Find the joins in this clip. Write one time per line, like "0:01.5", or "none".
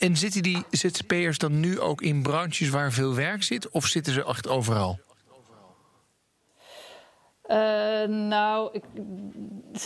none